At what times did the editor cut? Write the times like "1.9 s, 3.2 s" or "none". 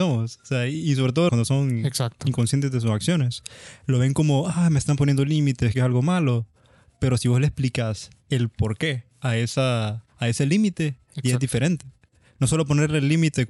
1.3 s, 5.7 s, 9.1 s